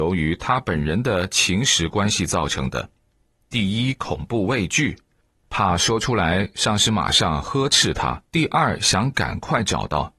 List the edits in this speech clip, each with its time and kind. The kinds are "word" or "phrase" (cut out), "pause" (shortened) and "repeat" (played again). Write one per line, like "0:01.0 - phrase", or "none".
0:08.3 - pause